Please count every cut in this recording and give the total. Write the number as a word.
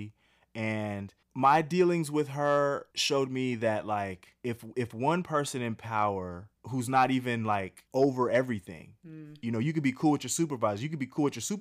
five